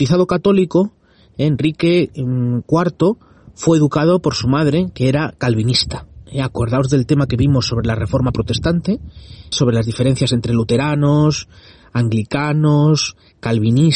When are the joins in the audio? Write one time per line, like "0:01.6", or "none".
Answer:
0:09.5